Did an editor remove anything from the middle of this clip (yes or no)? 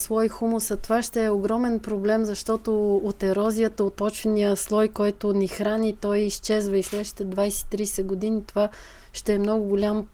yes